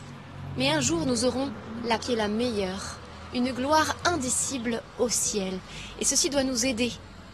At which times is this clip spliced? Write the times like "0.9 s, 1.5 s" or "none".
2.0 s